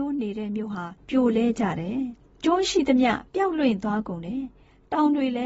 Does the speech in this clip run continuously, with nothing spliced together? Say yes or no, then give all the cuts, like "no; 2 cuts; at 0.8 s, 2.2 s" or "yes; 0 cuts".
no; 2 cuts; at 1.0 s, 3.3 s